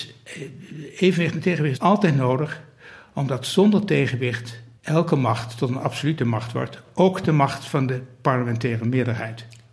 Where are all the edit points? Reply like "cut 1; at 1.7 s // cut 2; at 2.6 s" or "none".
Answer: cut 1; at 1.8 s // cut 2; at 4.8 s